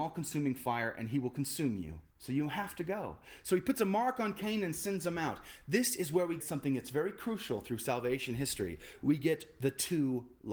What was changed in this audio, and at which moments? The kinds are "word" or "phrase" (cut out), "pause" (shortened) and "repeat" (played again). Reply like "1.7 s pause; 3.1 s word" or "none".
2.1 s pause; 6.4 s word